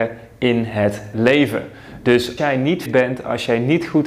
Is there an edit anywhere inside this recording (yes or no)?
yes